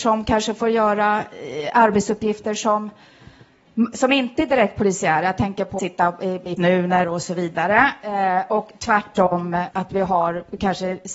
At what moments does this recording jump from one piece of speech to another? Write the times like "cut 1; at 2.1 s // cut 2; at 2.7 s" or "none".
cut 1; at 5.8 s // cut 2; at 6.6 s // cut 3; at 7.0 s // cut 4; at 9.7 s